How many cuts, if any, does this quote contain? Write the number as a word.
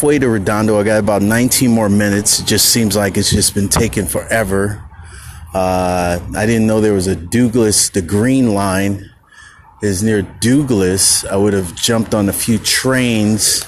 zero